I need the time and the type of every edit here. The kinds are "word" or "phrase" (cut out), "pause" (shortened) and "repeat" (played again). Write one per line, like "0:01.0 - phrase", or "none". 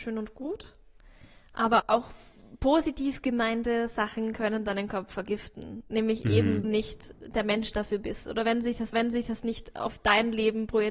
0:01.8 - word
0:06.6 - phrase
0:08.9 - repeat

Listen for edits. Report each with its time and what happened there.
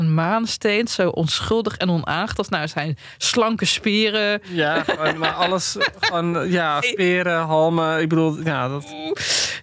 0:06.8 - word

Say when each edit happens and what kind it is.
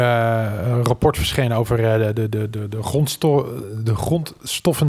none

